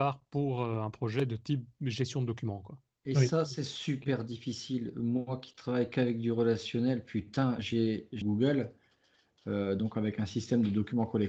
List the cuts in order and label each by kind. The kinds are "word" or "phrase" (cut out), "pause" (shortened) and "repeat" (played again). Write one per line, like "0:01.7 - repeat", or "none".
0:08.2 - phrase